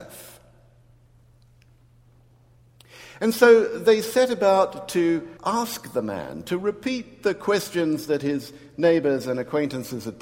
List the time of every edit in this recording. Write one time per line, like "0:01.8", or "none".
0:05.4